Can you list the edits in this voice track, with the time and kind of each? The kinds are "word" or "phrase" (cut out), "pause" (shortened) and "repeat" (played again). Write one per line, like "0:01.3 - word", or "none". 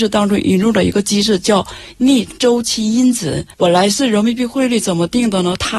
0:03.5 - pause